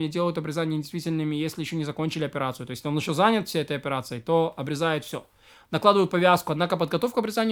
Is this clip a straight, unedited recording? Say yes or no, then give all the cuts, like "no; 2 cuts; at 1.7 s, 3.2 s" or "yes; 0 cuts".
yes; 0 cuts